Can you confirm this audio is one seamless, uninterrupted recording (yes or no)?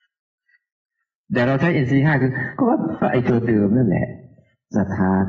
yes